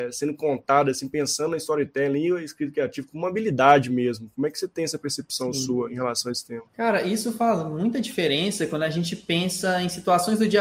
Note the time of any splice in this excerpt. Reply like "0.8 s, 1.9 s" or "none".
6.7 s